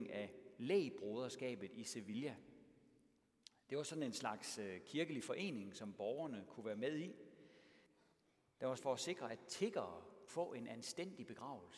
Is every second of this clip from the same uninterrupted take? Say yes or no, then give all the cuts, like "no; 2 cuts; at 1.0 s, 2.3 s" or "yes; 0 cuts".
no; 2 cuts; at 8.8 s, 10.3 s